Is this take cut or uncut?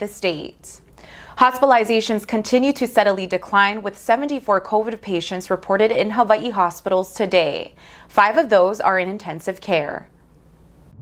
uncut